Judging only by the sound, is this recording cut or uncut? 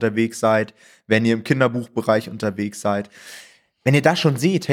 uncut